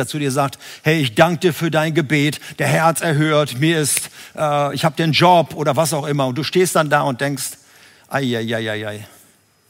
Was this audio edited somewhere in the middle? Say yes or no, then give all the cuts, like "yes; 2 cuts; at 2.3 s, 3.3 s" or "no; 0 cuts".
no; 0 cuts